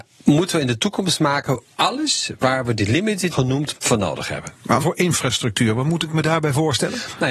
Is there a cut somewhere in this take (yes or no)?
yes